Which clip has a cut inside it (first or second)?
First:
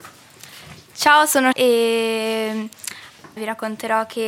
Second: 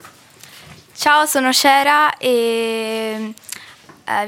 first